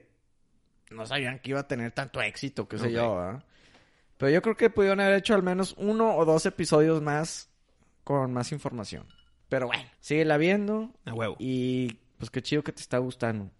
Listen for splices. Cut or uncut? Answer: cut